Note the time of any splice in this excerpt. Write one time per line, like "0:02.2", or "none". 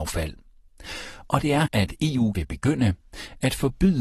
0:01.7
0:02.3